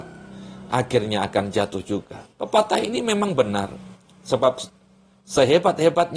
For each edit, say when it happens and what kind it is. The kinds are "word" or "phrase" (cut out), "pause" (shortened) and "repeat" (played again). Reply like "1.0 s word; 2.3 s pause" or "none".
2.3 s pause